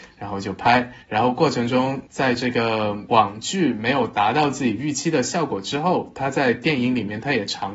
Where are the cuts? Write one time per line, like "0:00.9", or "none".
0:01.0
0:02.1